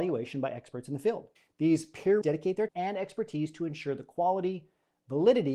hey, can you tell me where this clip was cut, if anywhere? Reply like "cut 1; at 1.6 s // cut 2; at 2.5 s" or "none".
cut 1; at 1.4 s // cut 2; at 2.2 s // cut 3; at 2.7 s